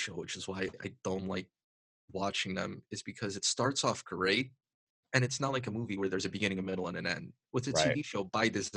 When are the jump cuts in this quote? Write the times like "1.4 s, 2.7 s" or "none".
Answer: none